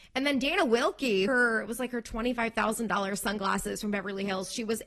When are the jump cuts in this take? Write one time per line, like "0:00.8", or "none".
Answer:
0:01.3